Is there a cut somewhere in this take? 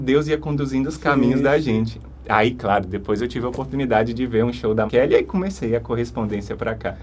yes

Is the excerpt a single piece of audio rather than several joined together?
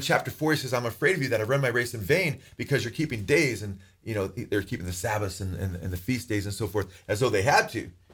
yes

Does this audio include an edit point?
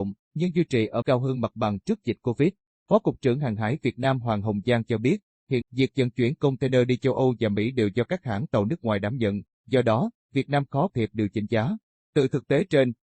yes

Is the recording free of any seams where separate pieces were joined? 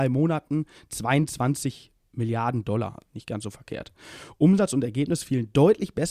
no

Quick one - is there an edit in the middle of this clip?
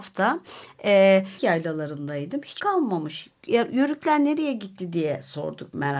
yes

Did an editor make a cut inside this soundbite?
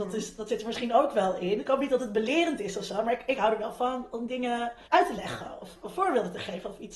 yes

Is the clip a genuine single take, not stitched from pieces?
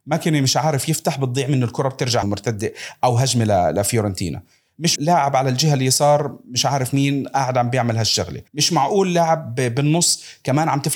no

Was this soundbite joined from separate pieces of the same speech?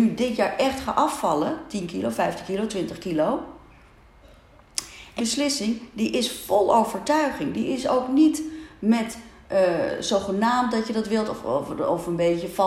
yes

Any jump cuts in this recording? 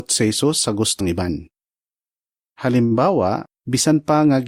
yes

